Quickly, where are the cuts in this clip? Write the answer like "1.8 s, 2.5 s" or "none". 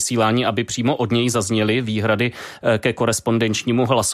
none